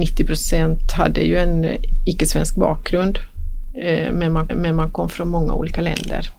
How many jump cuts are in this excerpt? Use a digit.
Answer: 1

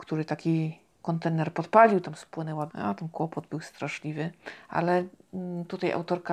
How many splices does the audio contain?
1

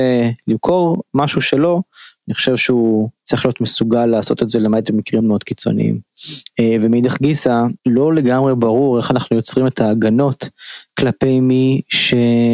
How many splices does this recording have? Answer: 3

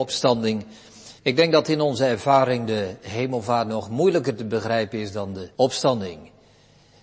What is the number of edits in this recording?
2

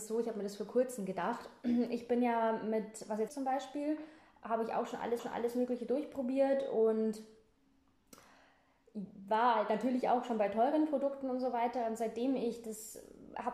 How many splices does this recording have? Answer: 2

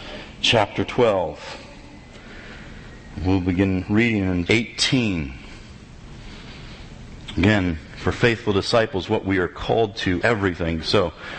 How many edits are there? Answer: 2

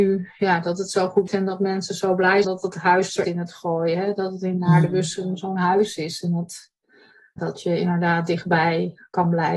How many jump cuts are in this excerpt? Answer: 4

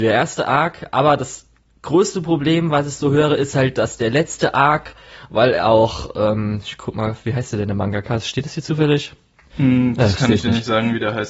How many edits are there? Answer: 0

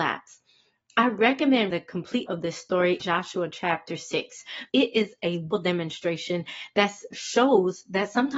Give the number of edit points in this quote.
6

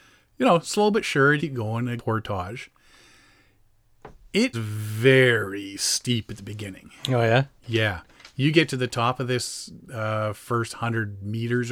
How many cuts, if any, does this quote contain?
3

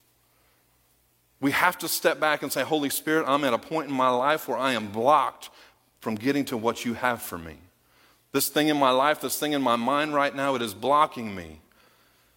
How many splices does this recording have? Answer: 0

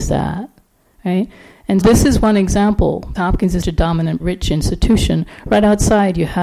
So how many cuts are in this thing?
4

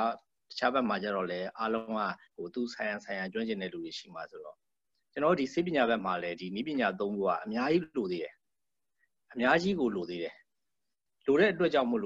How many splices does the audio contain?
1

